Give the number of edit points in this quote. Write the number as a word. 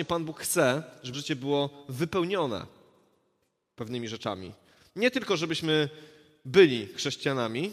one